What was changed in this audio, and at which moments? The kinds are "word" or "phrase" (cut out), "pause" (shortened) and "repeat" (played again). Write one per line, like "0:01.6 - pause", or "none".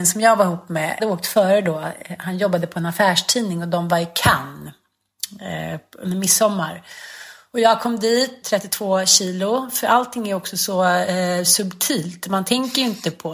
0:01.0 - phrase
0:08.4 - phrase